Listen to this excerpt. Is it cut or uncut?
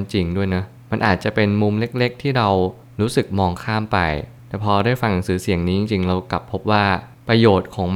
uncut